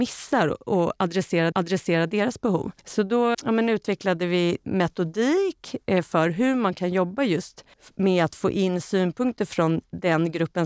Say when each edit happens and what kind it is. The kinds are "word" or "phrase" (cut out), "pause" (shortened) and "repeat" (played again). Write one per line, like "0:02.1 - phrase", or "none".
0:01.5 - repeat
0:02.8 - pause
0:03.3 - word
0:04.6 - word